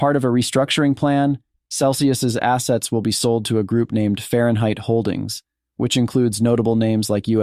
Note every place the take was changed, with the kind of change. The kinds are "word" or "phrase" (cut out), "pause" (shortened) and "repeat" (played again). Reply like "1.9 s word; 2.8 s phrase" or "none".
none